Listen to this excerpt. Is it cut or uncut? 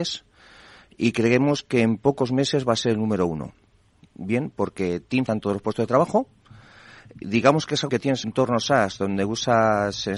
cut